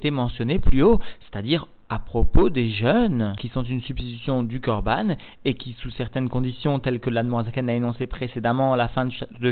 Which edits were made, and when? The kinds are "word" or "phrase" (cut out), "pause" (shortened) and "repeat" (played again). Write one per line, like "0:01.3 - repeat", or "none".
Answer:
none